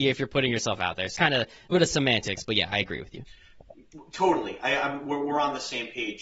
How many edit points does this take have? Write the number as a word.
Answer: two